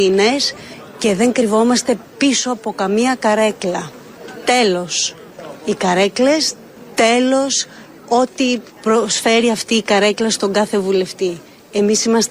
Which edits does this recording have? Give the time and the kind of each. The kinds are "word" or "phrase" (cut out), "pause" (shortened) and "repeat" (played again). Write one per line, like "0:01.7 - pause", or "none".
0:08.7 - pause